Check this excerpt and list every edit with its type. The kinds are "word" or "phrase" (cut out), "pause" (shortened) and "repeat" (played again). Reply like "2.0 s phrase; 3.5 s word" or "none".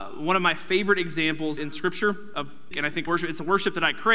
1.6 s phrase; 2.7 s word; 3.1 s word